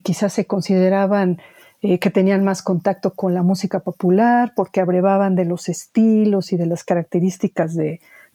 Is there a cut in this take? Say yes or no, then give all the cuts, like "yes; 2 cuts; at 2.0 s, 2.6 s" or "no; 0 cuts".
no; 0 cuts